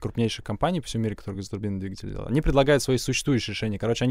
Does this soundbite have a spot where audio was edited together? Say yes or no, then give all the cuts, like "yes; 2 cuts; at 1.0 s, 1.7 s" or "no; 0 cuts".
no; 0 cuts